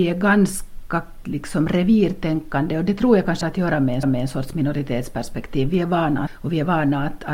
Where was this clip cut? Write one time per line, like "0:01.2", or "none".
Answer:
0:01.2
0:03.4
0:04.0
0:06.3